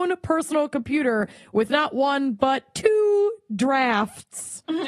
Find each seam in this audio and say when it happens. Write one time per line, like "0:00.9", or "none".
none